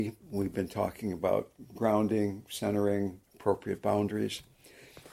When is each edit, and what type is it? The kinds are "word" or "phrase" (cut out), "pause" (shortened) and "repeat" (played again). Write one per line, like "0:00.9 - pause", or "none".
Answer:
0:03.2 - pause